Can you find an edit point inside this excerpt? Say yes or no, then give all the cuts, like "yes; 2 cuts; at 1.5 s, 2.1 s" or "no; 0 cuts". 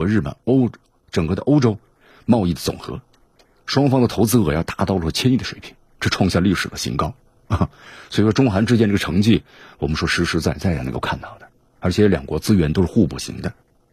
no; 0 cuts